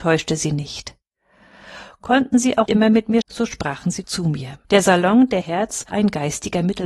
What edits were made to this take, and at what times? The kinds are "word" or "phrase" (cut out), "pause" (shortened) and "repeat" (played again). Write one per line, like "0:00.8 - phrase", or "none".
0:02.7 - word
0:03.2 - word
0:04.0 - word
0:04.6 - pause
0:05.4 - word
0:05.9 - word